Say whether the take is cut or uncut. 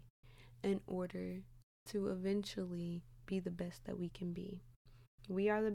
uncut